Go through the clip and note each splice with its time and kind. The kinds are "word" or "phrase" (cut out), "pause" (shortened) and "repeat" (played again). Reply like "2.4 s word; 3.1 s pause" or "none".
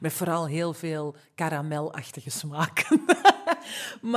none